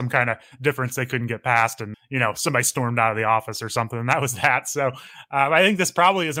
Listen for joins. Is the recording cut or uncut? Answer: cut